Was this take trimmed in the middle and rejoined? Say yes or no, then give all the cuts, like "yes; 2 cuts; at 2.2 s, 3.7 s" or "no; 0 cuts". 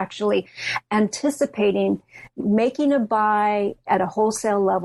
yes; 1 cut; at 2.4 s